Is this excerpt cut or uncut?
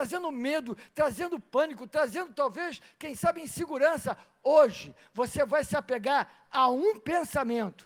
uncut